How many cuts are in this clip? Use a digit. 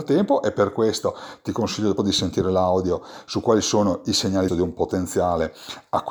2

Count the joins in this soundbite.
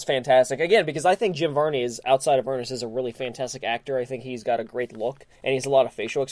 1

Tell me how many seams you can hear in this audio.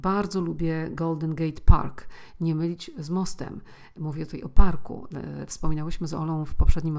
0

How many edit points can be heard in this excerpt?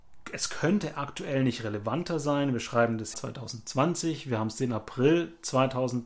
1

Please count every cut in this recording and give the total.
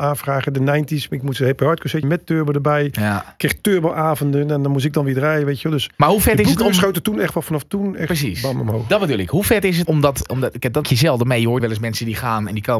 5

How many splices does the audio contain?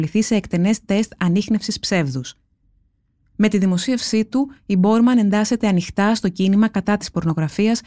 0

